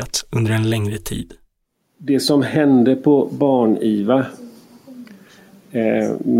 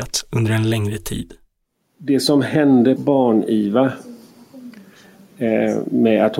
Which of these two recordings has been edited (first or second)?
second